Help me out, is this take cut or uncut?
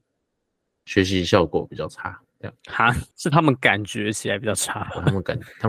cut